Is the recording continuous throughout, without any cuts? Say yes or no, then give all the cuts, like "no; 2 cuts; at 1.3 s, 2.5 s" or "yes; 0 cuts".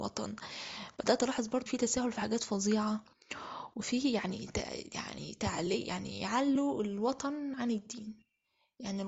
no; 1 cut; at 1.7 s